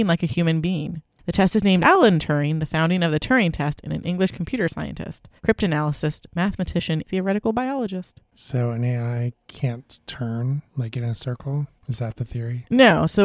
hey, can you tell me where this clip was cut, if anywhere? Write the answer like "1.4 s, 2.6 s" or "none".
1.8 s, 5.4 s, 7.0 s, 8.3 s, 10.7 s, 11.8 s